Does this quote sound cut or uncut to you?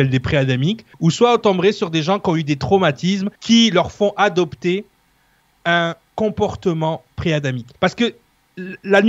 cut